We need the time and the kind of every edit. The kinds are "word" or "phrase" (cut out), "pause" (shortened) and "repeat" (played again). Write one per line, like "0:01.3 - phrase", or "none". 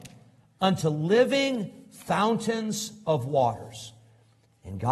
none

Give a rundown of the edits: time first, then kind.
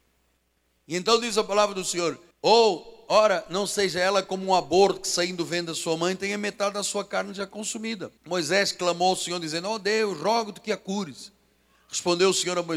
0:02.3 - pause
0:08.2 - pause

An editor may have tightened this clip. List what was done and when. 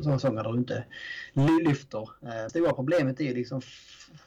0:02.5 - word

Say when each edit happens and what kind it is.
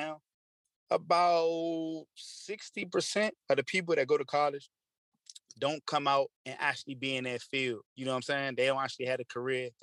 0:03.4 - pause
0:06.4 - pause
0:07.9 - pause

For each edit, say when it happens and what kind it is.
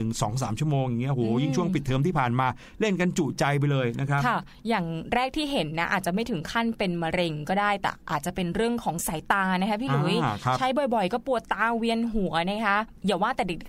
none

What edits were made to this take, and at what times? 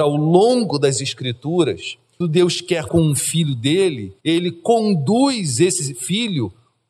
0:02.2 - word
0:02.9 - word
0:04.2 - pause

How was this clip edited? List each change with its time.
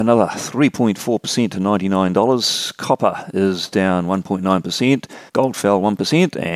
0:05.3 - pause

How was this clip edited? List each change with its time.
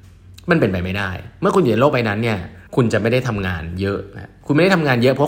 0:02.7 - pause

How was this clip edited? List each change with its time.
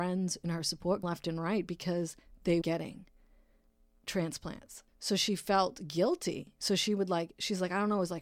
0:01.0 - phrase
0:02.6 - word
0:04.9 - pause

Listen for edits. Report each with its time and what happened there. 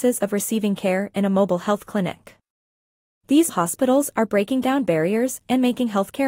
0:03.5 - word

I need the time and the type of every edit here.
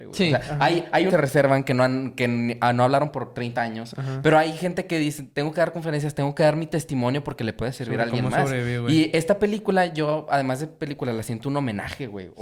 0:01.1 - phrase

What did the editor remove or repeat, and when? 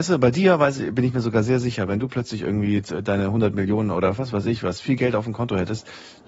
none

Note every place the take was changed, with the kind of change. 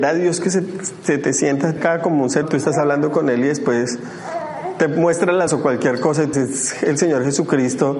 0:01.8 - word
0:02.4 - word
0:05.5 - word
0:06.3 - word

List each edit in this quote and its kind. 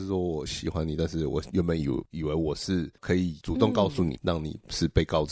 0:04.2 - word

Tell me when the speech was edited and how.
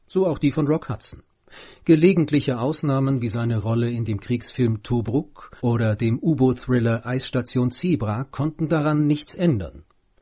0:05.6 - pause

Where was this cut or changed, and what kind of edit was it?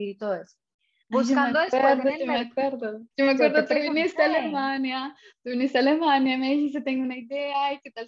0:03.1 - pause

